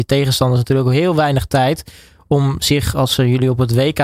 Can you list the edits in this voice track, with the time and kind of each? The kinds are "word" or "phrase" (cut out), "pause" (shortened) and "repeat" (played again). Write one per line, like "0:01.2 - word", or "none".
none